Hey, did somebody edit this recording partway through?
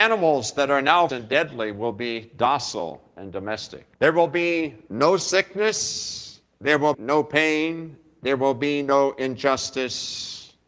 yes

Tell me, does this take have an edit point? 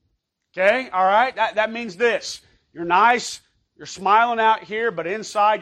no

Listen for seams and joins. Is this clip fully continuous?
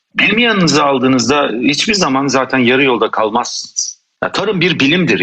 yes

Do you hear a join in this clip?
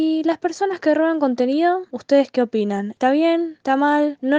no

